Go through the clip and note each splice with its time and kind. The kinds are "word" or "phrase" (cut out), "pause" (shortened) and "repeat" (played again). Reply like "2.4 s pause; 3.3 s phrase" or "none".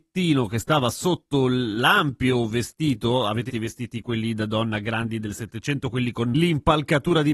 3.5 s word